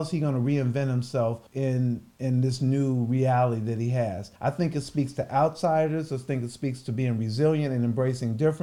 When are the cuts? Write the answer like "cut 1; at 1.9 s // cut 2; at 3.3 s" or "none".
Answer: cut 1; at 1.5 s // cut 2; at 4.4 s